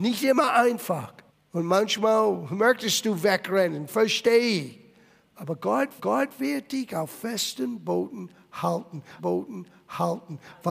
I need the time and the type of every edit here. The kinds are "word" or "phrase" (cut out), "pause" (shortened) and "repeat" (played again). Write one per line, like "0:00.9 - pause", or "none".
0:01.3 - pause
0:06.0 - repeat
0:09.2 - repeat